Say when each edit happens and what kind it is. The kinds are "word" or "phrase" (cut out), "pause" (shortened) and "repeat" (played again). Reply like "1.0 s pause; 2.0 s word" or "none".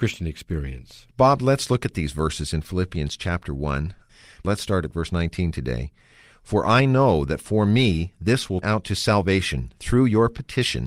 1.1 s pause; 8.6 s word